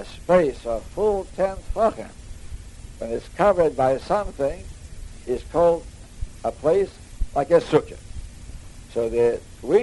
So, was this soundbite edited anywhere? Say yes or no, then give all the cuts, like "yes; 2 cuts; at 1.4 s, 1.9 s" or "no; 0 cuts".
no; 0 cuts